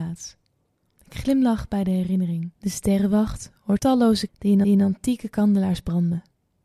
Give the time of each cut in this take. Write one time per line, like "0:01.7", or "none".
0:02.5
0:03.8
0:04.3
0:04.6